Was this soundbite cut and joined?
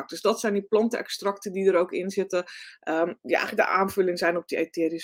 no; 0 cuts

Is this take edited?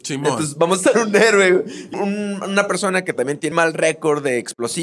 yes; 3 cuts; at 0.9 s, 1.9 s, 3.5 s

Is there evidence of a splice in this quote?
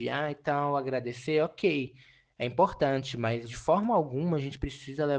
no; 0 cuts

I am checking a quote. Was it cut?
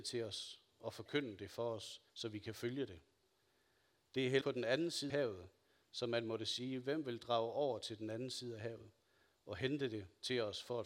yes; 3 cuts; at 2.1 s, 4.4 s, 5.1 s

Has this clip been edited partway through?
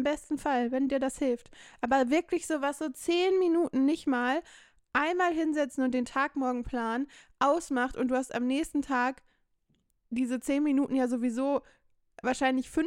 no; 0 cuts

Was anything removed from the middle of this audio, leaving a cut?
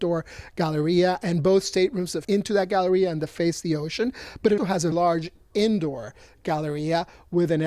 yes; 3 cuts; at 2.2 s, 4.6 s, 4.9 s

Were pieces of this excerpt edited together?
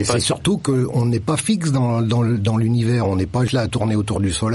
yes; 1 cut; at 3.5 s

